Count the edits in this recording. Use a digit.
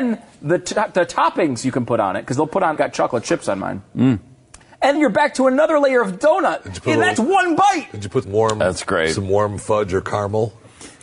4